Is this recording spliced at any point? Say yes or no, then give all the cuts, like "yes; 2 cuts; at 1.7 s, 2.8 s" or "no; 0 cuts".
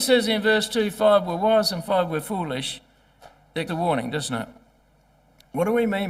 yes; 1 cut; at 3.7 s